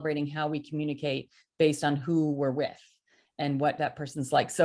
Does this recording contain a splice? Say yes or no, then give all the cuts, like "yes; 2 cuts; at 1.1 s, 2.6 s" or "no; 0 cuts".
no; 0 cuts